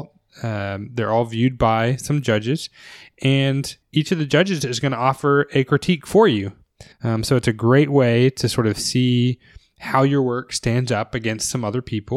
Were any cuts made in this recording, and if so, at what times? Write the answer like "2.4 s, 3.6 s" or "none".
3.8 s, 6.9 s

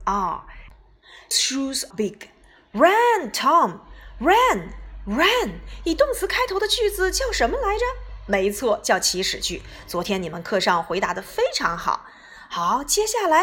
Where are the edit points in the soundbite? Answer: 1.3 s, 1.9 s

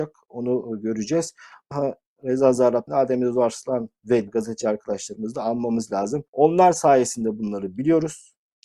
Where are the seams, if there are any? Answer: 1.7 s, 2.9 s, 4.3 s, 6.3 s

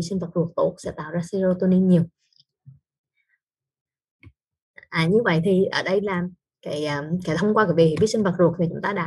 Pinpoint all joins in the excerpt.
none

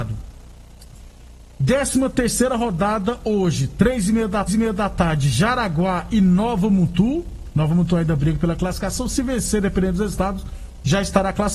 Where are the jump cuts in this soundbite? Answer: 4.5 s

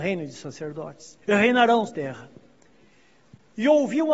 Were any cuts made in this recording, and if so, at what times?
1.2 s, 1.9 s

